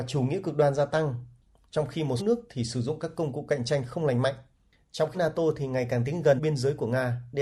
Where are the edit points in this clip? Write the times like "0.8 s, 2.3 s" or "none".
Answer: 2.2 s, 5.1 s, 6.4 s